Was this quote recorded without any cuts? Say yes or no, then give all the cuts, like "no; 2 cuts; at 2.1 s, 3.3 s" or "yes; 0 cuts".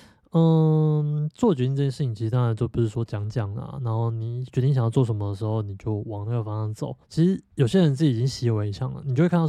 no; 1 cut; at 7.0 s